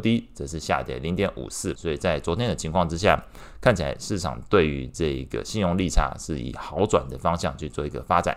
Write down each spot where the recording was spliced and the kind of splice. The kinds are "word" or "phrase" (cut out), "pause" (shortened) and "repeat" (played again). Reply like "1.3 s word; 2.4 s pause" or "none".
1.7 s word